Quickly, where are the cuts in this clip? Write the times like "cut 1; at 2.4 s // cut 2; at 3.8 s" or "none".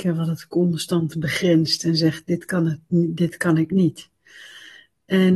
none